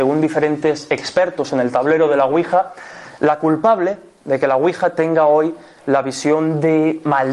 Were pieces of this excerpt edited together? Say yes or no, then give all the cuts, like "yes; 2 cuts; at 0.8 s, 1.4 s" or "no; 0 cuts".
no; 0 cuts